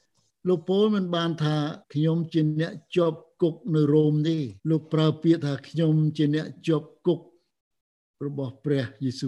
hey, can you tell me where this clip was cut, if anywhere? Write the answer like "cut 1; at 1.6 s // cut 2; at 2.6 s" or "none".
cut 1; at 1.8 s // cut 2; at 4.6 s